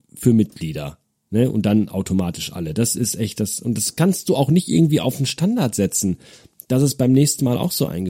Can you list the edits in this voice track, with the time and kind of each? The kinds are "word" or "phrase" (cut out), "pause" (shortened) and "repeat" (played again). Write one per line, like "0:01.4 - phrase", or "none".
none

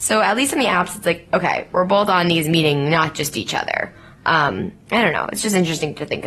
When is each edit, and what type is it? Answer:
none

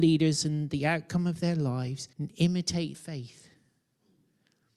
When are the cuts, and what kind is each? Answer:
0:02.1 - pause
0:02.9 - word

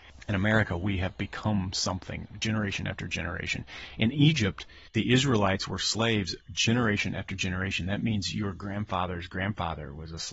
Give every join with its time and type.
0:04.9 - pause

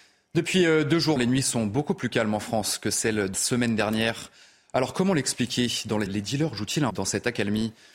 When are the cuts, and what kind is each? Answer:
0:01.2 - word
0:03.3 - word
0:06.1 - word
0:06.9 - word

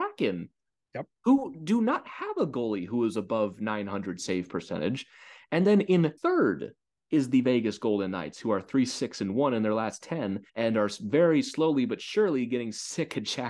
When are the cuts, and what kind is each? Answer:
0:06.2 - pause
0:10.5 - pause

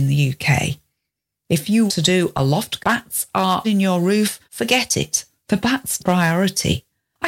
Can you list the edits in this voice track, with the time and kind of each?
0:01.9 - word
0:02.8 - phrase
0:03.6 - word
0:04.4 - pause
0:06.0 - word

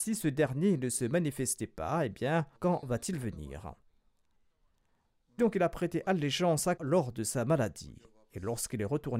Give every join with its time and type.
0:02.6 - pause
0:05.4 - word
0:06.8 - word

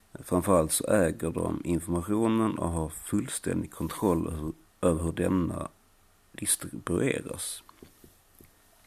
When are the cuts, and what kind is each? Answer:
none

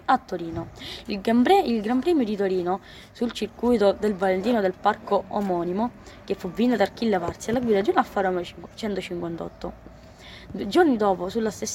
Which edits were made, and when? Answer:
none

